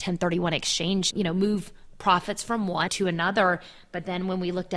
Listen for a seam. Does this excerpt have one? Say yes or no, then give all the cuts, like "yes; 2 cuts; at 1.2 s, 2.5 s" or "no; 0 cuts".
yes; 2 cuts; at 1.1 s, 2.9 s